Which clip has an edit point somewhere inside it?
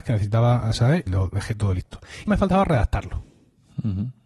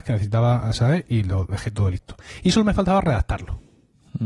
first; 2 cuts; at 1.1 s, 2.3 s

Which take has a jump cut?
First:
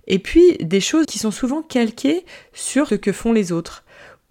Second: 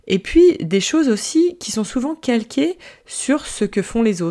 first; 2 cuts; at 1.0 s, 2.9 s

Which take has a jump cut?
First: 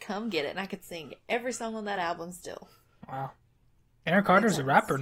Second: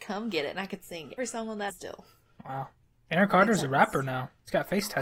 second; 3 cuts; at 1.2 s, 1.7 s, 2.8 s

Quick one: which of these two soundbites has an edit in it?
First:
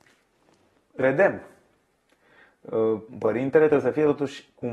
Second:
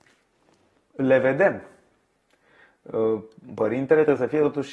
first; 2 cuts; at 1.0 s, 3.1 s

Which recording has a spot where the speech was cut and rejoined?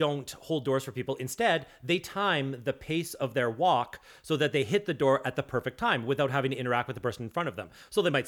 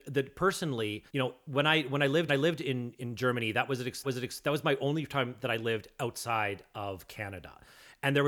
second; 3 cuts; at 1.1 s, 2.3 s, 4.0 s

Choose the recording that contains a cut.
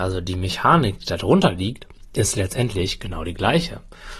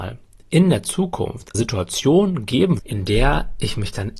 second; 2 cuts; at 1.5 s, 2.8 s

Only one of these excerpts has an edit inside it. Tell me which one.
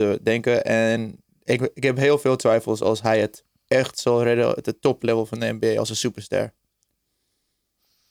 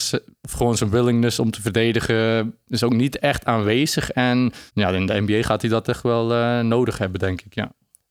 second; 1 cut; at 4.7 s

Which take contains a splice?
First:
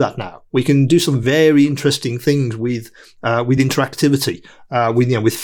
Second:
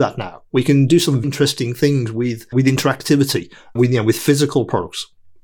second; 3 cuts; at 1.2 s, 2.5 s, 3.8 s

